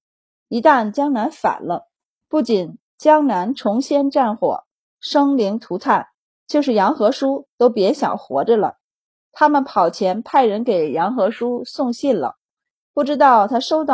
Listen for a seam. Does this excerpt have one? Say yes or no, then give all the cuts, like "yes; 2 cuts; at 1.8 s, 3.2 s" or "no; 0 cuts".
no; 0 cuts